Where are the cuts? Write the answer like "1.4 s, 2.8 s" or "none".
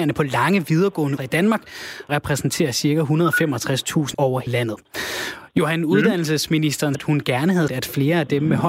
1.2 s, 2.1 s, 4.1 s, 4.5 s, 6.9 s, 7.7 s